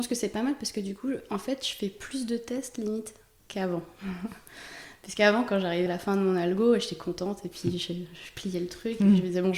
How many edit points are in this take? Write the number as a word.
two